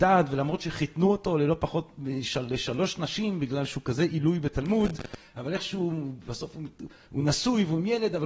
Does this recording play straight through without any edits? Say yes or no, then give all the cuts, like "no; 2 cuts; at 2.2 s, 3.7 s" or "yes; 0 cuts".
yes; 0 cuts